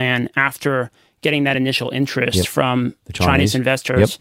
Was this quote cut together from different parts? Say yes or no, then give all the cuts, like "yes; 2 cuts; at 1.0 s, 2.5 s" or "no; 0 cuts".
no; 0 cuts